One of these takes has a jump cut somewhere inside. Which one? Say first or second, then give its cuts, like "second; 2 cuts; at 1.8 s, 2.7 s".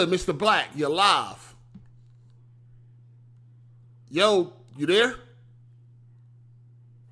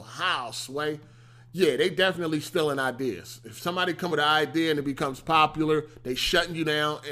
second; 1 cut; at 4.1 s